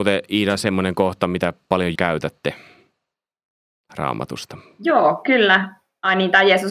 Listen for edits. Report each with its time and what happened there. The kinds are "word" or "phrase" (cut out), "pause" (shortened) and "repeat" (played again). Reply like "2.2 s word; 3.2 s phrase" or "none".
2.0 s word